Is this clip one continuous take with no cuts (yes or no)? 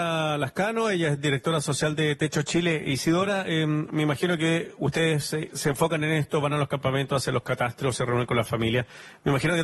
yes